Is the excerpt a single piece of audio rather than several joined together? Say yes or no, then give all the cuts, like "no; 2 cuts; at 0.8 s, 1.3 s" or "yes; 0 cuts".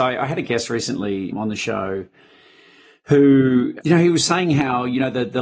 no; 2 cuts; at 1.3 s, 3.8 s